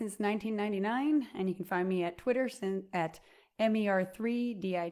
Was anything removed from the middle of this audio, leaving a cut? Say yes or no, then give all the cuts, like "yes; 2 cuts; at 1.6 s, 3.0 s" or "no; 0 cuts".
no; 0 cuts